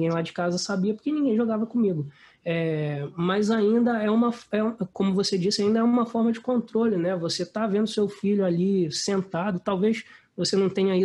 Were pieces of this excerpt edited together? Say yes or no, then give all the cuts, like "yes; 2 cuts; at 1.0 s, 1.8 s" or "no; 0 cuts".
no; 0 cuts